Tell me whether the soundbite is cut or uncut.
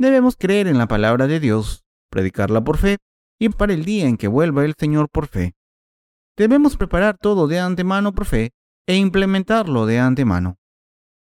cut